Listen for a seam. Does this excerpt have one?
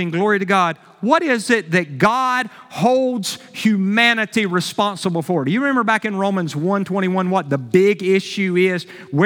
no; 0 cuts

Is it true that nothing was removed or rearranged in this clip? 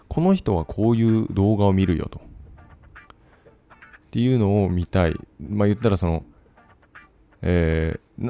yes; 0 cuts

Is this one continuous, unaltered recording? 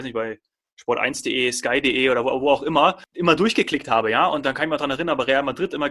yes; 0 cuts

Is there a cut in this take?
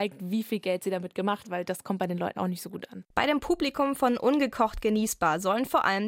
yes; 2 cuts; at 1.4 s, 2.3 s

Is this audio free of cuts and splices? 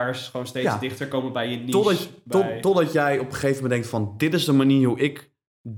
yes; 0 cuts

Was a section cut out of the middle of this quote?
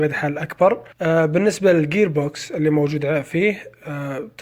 yes; 1 cut; at 0.9 s

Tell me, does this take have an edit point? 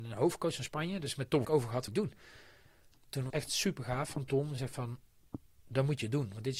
yes; 4 cuts; at 1.4 s, 1.9 s, 3.3 s, 4.6 s

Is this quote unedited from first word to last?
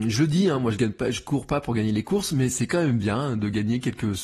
yes; 0 cuts

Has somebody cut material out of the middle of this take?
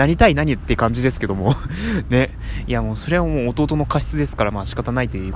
no; 0 cuts

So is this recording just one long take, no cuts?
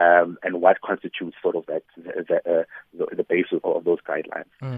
no; 3 cuts; at 2.0 s, 3.1 s, 3.6 s

